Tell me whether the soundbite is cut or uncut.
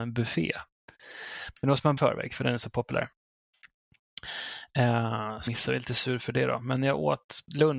cut